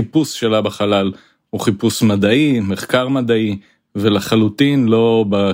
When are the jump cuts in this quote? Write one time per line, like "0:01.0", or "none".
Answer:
none